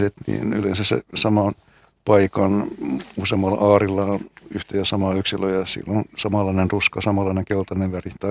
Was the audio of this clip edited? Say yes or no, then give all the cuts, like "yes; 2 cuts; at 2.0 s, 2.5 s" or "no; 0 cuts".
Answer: no; 0 cuts